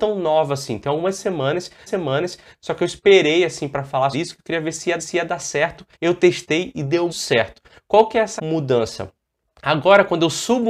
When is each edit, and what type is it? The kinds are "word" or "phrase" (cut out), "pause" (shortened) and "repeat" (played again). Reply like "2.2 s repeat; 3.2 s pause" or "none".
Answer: 1.9 s repeat; 4.1 s word; 5.0 s repeat; 5.9 s pause; 7.1 s word; 8.4 s word